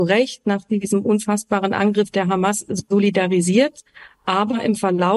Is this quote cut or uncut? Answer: uncut